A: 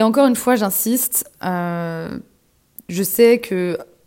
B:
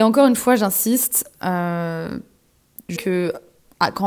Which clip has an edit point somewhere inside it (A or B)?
B